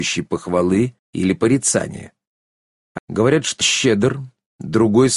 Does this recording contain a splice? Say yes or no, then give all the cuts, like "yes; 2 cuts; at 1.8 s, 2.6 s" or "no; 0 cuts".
yes; 3 cuts; at 1.0 s, 3.0 s, 3.6 s